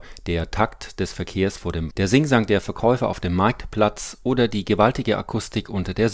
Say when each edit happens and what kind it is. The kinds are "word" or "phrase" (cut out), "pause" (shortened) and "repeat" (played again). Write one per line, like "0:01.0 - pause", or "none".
0:01.9 - word